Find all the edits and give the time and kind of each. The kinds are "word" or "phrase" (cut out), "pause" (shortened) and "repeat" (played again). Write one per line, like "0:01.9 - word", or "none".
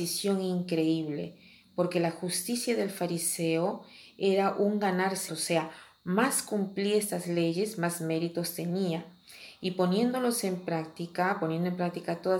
0:05.3 - word